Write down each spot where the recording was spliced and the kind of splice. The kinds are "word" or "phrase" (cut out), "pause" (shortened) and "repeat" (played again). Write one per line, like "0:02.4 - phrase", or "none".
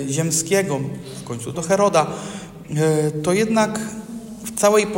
0:01.5 - word